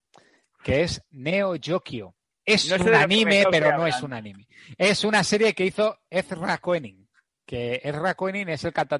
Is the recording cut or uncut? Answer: uncut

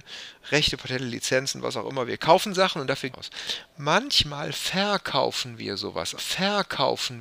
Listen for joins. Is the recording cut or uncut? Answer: cut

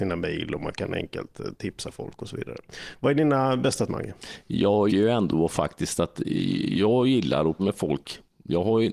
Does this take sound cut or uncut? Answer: cut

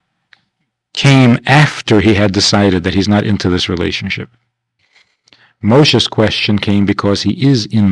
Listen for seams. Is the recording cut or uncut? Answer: cut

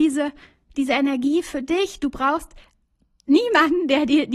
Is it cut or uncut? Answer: uncut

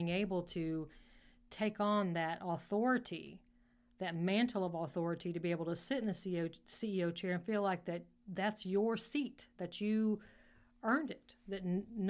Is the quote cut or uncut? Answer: uncut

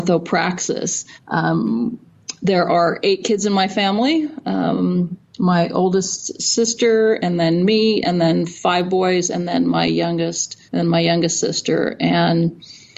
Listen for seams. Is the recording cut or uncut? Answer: cut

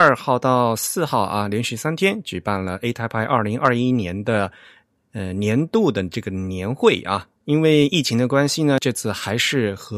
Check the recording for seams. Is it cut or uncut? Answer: uncut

